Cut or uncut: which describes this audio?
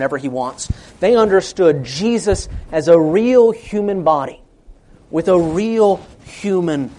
uncut